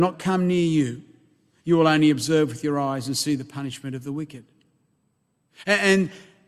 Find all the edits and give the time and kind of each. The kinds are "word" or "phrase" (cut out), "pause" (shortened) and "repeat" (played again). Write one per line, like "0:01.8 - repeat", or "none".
none